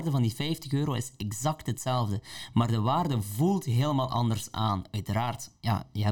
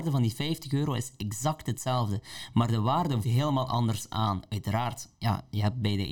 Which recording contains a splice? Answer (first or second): second